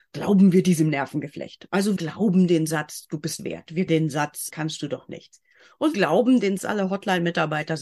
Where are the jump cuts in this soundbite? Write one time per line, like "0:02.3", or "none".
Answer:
0:02.0
0:03.4
0:03.9
0:04.5
0:05.9
0:06.6